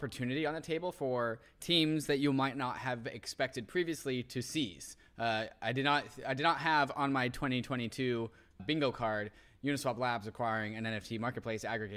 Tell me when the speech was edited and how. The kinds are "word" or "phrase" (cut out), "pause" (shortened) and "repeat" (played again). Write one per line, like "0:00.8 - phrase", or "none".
0:08.6 - word